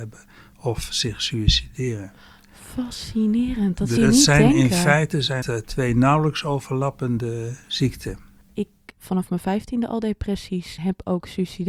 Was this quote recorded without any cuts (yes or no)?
no